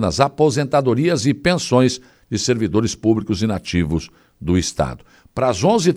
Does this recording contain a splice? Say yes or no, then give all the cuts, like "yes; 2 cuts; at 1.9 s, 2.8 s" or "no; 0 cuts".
no; 0 cuts